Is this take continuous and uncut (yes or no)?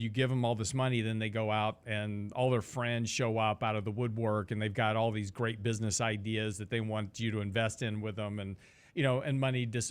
yes